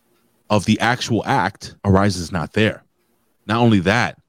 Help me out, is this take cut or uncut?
cut